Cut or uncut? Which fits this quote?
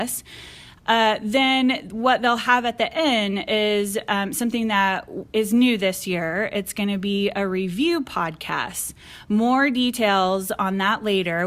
uncut